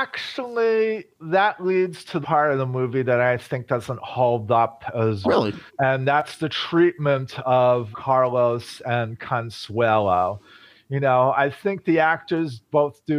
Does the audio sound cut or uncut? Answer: cut